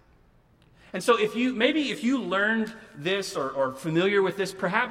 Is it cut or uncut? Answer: uncut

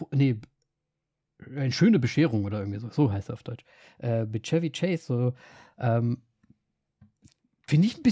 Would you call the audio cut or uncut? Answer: uncut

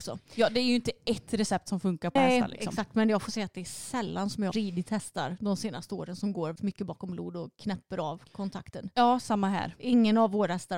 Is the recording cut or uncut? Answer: cut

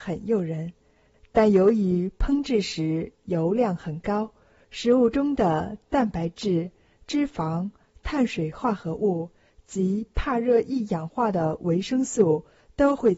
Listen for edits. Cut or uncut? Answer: uncut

